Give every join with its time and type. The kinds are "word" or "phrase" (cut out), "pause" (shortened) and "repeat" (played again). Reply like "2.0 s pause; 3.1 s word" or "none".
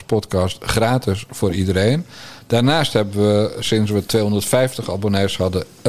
none